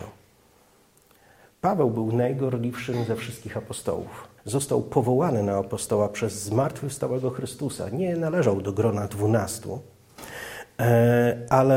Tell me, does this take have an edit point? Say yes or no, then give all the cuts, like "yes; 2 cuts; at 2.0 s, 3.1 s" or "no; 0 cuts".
yes; 1 cut; at 4.4 s